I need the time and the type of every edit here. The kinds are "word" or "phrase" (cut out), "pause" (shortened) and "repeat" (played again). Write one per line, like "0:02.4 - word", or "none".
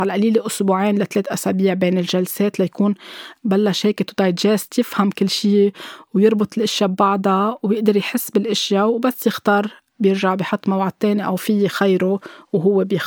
none